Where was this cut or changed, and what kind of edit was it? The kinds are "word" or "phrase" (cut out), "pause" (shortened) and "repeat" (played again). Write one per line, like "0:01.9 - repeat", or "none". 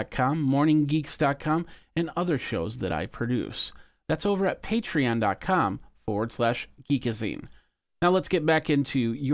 none